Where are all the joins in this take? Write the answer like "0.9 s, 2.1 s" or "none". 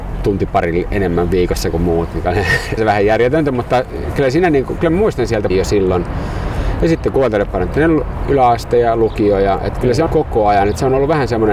2.8 s, 5.5 s, 10.1 s